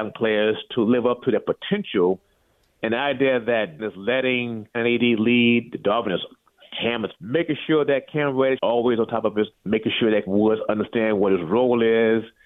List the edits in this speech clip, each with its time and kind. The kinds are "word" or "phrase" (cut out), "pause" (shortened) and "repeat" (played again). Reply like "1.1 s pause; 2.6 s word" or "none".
3.8 s word; 4.7 s word; 7.2 s word; 8.6 s word; 9.5 s word; 10.3 s word